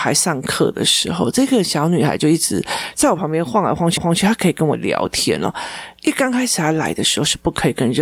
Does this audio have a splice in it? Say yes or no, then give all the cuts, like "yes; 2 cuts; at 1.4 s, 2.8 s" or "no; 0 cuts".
yes; 1 cut; at 4.0 s